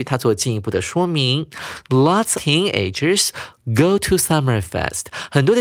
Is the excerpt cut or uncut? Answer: cut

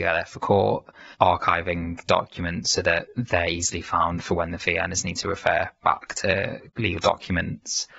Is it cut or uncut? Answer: cut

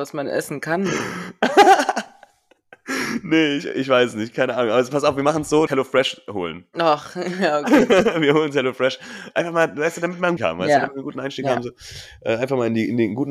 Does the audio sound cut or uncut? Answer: cut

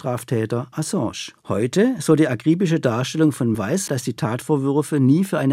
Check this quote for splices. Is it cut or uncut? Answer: cut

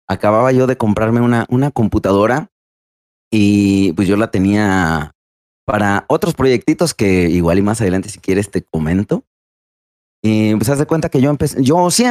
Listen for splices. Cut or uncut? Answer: uncut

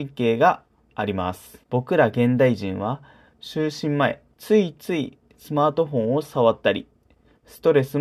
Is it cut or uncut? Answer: cut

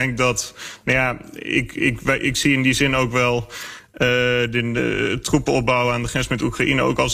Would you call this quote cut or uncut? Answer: uncut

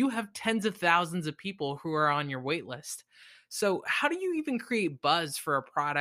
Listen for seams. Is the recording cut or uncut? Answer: uncut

